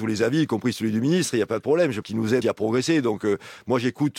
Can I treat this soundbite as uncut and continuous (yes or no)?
no